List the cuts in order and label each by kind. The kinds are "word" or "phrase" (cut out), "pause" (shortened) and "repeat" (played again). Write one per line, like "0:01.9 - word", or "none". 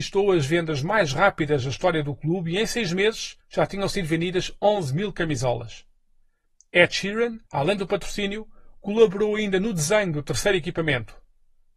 0:03.4 - pause
0:07.5 - pause